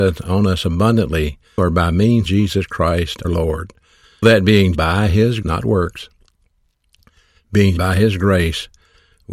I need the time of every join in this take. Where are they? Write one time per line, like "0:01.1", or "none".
0:01.6
0:02.2
0:03.2
0:04.2
0:04.7
0:05.4
0:07.8